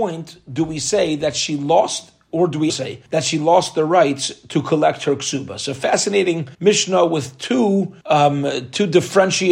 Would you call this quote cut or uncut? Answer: cut